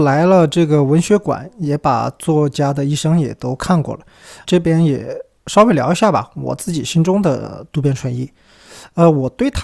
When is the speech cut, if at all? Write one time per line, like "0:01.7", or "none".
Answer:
0:04.4